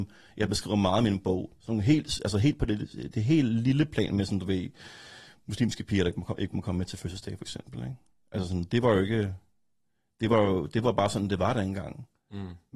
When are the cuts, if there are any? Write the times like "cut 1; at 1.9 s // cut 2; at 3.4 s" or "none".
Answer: none